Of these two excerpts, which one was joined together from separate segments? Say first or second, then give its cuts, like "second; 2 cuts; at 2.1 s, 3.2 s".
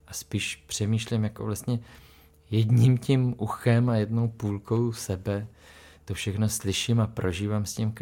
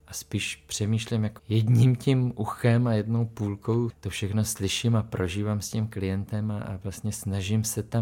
second; 2 cuts; at 1.4 s, 3.9 s